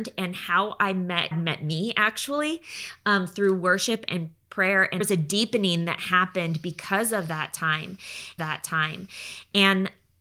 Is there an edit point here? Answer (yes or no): yes